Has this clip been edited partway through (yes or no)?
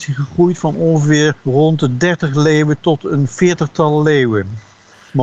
yes